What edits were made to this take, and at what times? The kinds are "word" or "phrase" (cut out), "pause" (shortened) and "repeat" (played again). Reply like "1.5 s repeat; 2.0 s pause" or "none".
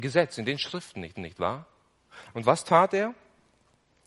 1.1 s repeat